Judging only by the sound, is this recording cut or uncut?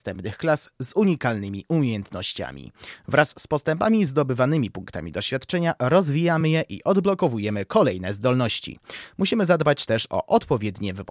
uncut